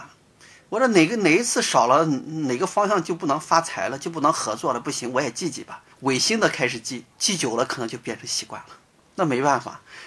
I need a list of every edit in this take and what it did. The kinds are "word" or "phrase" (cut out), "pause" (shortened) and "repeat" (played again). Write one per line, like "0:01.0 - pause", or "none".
0:05.9 - pause
0:07.1 - pause